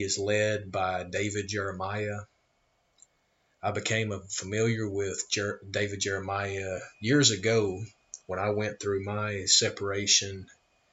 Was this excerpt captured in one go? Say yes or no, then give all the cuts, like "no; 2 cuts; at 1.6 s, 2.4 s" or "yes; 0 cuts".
yes; 0 cuts